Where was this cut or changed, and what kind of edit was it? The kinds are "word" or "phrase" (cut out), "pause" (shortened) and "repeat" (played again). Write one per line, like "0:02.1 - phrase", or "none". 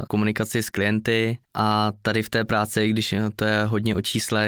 0:01.4 - pause